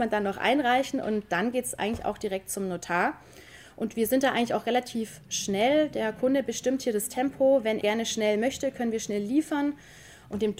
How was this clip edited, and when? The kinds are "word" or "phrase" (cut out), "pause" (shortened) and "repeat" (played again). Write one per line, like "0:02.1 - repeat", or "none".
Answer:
0:07.8 - word